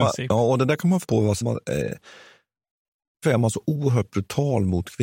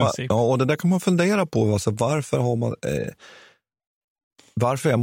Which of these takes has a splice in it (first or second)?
first